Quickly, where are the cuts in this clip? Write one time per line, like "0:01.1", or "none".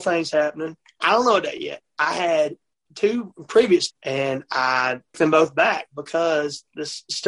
0:03.9
0:05.1